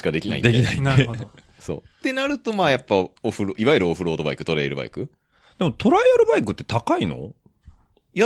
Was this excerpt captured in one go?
no; 1 cut; at 3.2 s

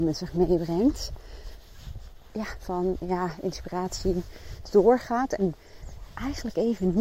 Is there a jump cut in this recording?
yes; 2 cuts; at 2.6 s, 4.7 s

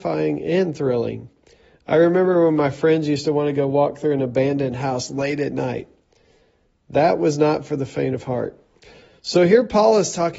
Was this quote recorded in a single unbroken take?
yes; 0 cuts

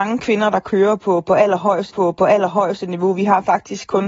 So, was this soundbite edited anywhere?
yes; 1 cut; at 1.9 s

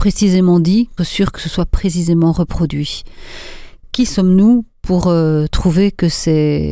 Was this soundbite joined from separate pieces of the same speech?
yes; 1 cut; at 1.0 s

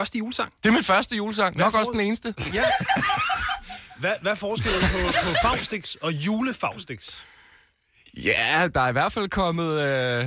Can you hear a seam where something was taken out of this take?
no; 0 cuts

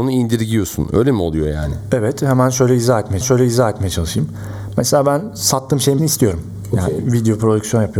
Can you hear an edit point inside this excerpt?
yes; 2 cuts; at 3.2 s, 6.0 s

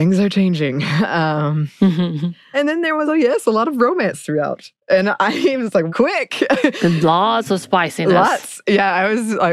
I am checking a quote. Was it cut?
yes; 3 cuts; at 2.5 s, 3.1 s, 5.9 s

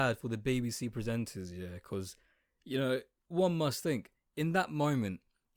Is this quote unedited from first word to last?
yes; 0 cuts

